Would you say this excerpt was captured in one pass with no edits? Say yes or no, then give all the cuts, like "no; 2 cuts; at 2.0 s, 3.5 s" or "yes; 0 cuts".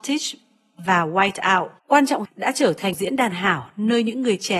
no; 4 cuts; at 1.8 s, 2.2 s, 2.9 s, 3.3 s